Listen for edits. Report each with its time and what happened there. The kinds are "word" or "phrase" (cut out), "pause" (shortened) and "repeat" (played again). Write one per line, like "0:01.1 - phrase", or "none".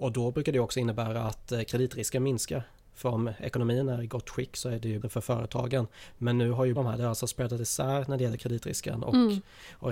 0:05.0 - word
0:06.7 - word